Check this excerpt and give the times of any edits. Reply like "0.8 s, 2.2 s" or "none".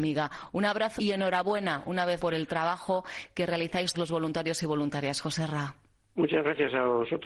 1.0 s, 2.2 s, 3.9 s